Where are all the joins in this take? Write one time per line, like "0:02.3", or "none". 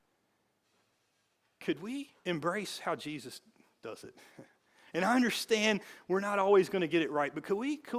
0:02.2